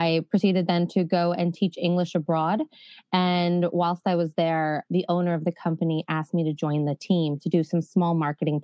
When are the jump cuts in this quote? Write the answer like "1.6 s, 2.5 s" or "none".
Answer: 4.9 s